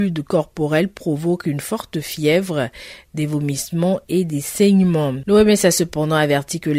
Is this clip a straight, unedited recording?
yes; 0 cuts

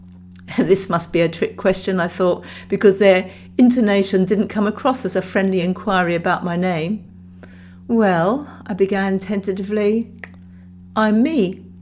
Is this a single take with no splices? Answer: yes; 0 cuts

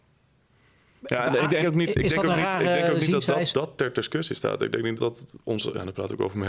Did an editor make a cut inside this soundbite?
yes; 3 cuts; at 1.6 s, 3.5 s, 5.0 s

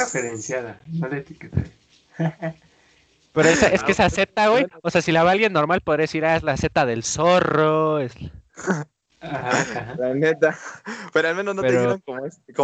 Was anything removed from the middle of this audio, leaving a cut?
no; 0 cuts

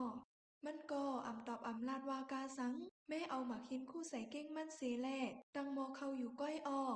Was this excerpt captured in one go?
no; 2 cuts; at 3.0 s, 5.5 s

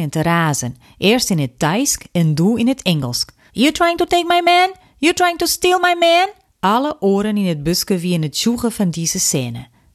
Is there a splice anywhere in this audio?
yes; 2 cuts; at 3.5 s, 6.5 s

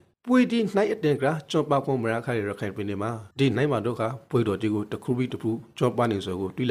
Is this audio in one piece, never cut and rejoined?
no; 1 cut; at 3.3 s

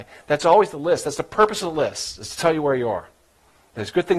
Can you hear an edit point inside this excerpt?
no; 0 cuts

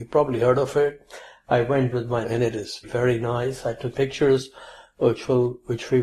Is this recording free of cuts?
no; 4 cuts; at 1.9 s, 2.2 s, 2.8 s, 3.9 s

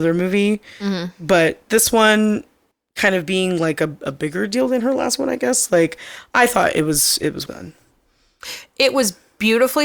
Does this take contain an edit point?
yes; 2 cuts; at 2.7 s, 7.5 s

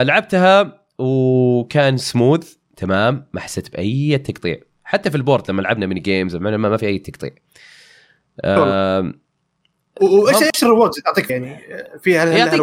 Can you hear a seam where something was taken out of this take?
yes; 1 cut; at 11.3 s

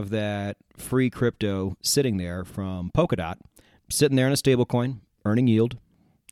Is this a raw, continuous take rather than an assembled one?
yes; 0 cuts

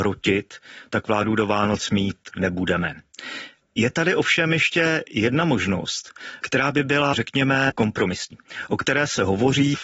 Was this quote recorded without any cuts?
no; 1 cut; at 3.6 s

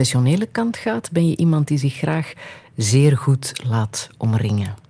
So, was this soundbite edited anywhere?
no; 0 cuts

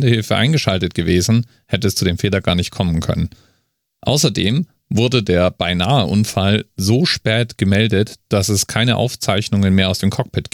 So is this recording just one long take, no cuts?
yes; 0 cuts

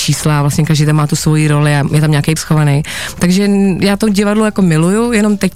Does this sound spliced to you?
yes; 1 cut; at 2.4 s

